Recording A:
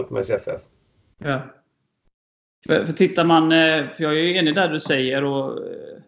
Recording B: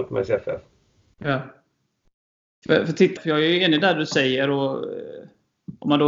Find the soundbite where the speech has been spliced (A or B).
B